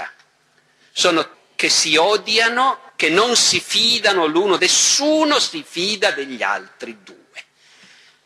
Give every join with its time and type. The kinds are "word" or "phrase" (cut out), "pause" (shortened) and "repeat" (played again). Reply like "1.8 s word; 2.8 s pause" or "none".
1.3 s phrase; 2.9 s pause; 4.6 s word